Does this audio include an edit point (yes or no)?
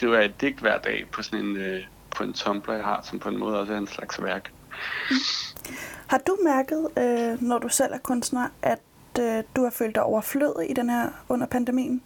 no